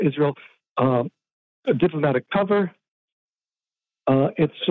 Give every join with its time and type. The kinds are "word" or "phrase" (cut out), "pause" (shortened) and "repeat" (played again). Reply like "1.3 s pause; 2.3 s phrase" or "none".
none